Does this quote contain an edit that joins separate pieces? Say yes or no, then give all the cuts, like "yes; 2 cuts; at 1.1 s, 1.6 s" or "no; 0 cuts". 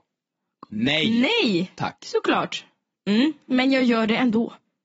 no; 0 cuts